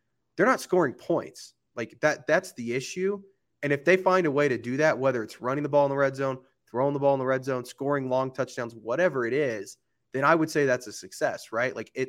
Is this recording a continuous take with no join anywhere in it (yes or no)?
yes